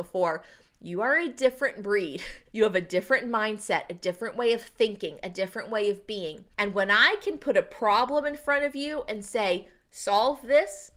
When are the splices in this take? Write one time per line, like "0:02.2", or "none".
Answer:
0:02.5
0:06.5